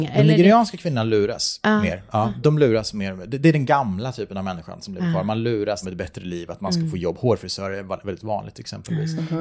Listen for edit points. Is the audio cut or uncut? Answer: cut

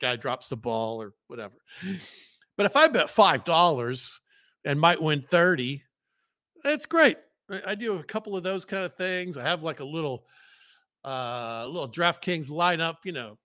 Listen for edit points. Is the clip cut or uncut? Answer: uncut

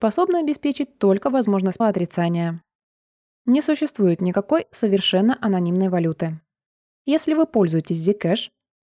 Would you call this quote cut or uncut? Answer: cut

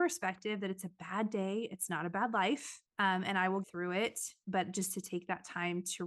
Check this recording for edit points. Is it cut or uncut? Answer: cut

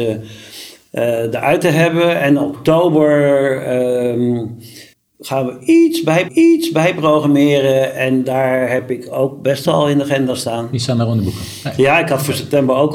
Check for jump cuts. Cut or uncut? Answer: cut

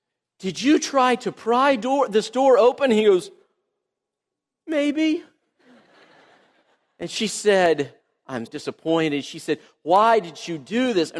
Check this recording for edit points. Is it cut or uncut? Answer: cut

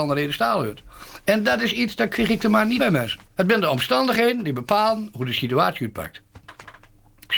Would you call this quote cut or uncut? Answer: cut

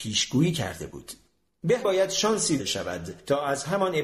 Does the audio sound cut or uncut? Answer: cut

